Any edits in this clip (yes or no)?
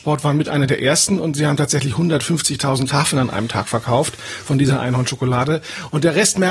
no